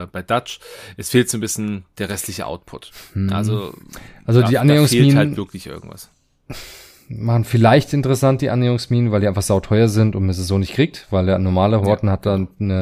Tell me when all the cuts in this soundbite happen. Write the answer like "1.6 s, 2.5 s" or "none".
none